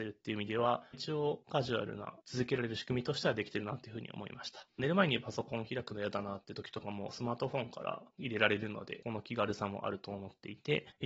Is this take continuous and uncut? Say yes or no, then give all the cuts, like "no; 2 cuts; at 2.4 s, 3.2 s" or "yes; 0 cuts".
no; 2 cuts; at 2.2 s, 4.7 s